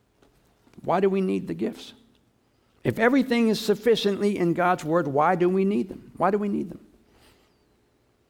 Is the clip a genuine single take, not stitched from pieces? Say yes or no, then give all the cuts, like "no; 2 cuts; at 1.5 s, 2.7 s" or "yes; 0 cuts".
yes; 0 cuts